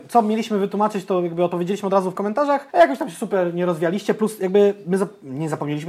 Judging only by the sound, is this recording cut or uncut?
cut